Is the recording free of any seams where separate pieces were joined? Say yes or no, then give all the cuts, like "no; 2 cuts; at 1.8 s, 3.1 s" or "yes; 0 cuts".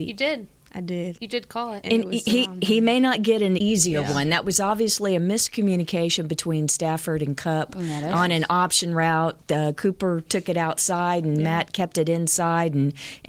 no; 1 cut; at 3.6 s